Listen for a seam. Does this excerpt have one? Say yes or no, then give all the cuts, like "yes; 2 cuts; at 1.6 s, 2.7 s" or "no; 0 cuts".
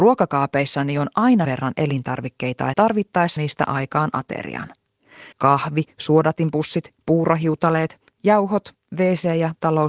yes; 4 cuts; at 1.4 s, 2.7 s, 3.4 s, 5.3 s